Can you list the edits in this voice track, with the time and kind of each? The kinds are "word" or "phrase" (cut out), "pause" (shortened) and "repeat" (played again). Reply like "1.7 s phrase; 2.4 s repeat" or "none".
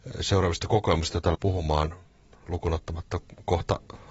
1.3 s word

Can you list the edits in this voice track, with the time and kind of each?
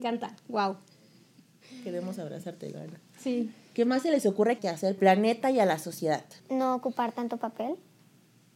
4.6 s phrase; 5.0 s phrase; 6.4 s pause

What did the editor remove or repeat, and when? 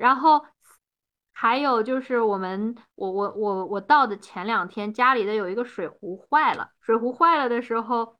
6.8 s pause

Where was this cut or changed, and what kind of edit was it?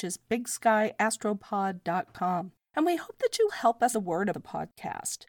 3.5 s word; 3.9 s word; 4.3 s word

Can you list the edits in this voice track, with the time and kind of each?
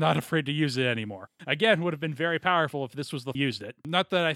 1.4 s pause; 3.3 s phrase

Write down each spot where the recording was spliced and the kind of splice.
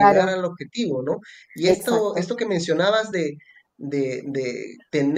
none

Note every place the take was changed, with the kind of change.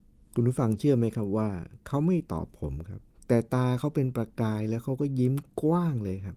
3.1 s pause

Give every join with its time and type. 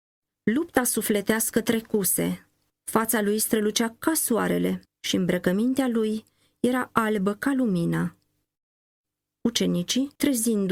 none

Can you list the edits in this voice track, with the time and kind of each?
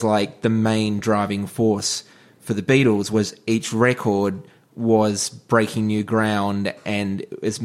none

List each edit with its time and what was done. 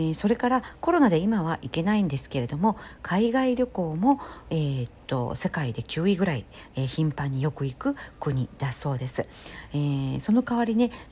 none

